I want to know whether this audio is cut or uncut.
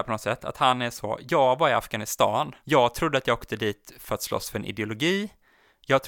cut